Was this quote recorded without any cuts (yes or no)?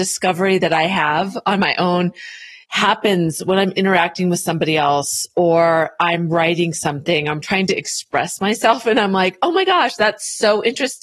no